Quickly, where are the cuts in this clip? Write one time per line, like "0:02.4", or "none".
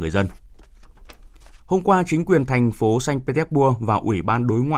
0:01.6

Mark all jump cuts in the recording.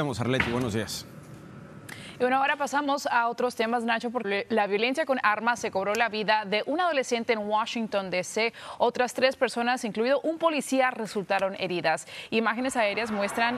0:04.2

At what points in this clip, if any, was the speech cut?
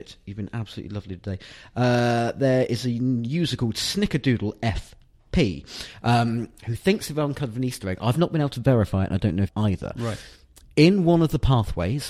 0:09.5

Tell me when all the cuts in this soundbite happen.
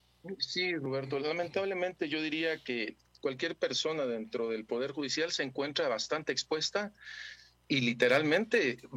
none

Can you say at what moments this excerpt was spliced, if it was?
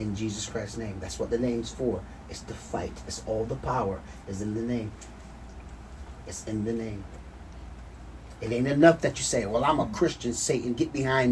none

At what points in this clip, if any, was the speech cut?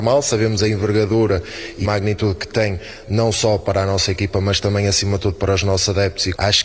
0:01.8

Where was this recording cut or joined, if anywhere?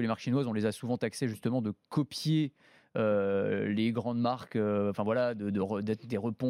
none

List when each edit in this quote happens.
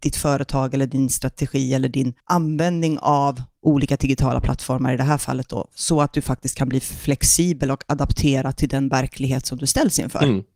none

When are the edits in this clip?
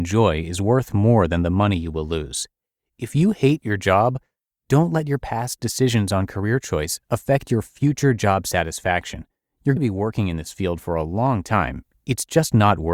0:09.8

